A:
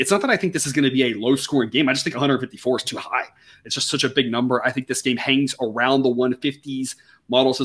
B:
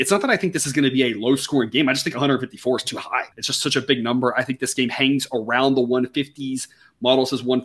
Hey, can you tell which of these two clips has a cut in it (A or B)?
B